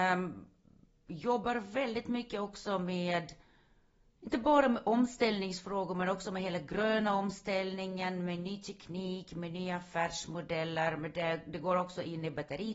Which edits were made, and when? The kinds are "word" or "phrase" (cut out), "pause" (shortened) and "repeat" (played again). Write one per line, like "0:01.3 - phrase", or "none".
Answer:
none